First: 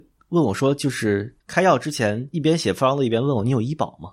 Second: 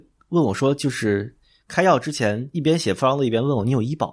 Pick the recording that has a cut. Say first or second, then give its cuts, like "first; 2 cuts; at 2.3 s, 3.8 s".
first; 1 cut; at 1.4 s